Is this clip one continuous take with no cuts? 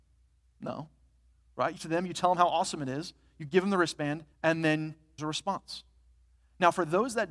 no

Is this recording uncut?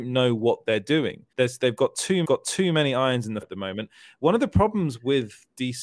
no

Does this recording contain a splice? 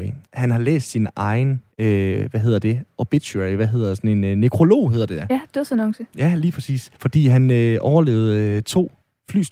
yes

